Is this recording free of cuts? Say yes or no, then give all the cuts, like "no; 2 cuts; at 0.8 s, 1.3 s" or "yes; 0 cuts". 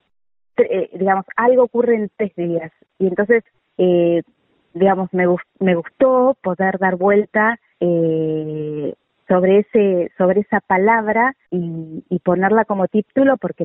no; 3 cuts; at 3.5 s, 7.7 s, 11.4 s